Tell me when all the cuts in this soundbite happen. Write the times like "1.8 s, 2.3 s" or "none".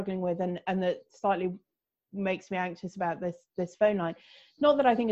none